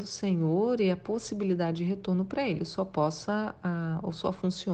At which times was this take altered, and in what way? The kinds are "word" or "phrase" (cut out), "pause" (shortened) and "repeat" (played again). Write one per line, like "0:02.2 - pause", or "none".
none